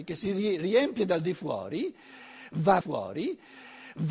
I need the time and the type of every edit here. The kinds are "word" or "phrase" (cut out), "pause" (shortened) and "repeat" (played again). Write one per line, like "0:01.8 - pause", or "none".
0:02.8 - repeat